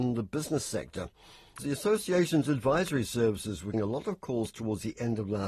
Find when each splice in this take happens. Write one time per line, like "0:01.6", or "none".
0:01.6
0:03.7